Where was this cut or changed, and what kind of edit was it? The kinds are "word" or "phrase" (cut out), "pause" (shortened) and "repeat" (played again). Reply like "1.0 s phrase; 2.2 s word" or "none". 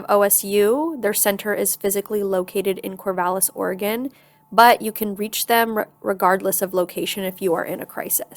none

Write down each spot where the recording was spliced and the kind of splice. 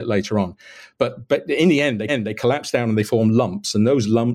2.1 s repeat

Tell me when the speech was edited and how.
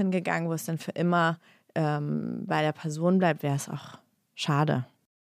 none

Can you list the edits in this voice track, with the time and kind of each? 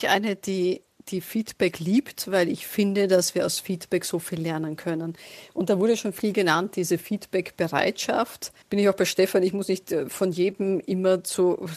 8.6 s pause

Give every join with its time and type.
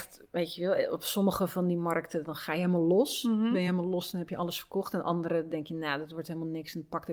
none

